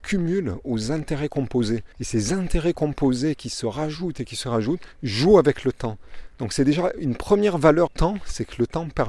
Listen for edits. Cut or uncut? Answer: cut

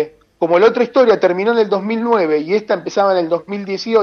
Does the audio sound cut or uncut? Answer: uncut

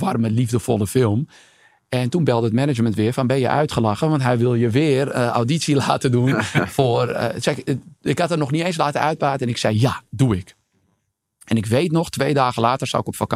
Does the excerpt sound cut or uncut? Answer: uncut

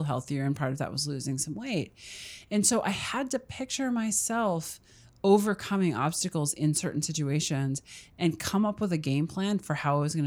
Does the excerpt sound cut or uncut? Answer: uncut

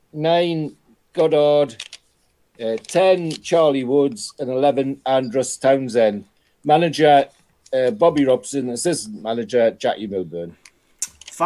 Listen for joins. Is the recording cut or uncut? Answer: uncut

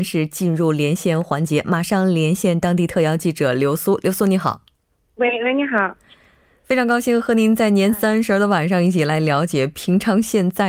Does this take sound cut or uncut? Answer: cut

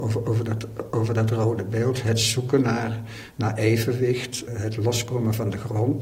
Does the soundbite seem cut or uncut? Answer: cut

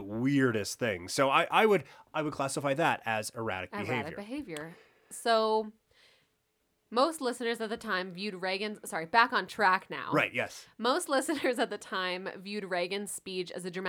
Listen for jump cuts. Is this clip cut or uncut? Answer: uncut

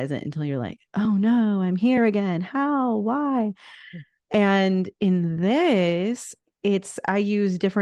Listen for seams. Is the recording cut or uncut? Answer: uncut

